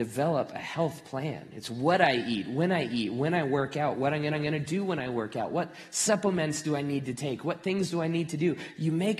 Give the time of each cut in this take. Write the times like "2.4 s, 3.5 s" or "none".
4.3 s